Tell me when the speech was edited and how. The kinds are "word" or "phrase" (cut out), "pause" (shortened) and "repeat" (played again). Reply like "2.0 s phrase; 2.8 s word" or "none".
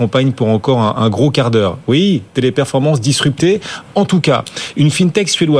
none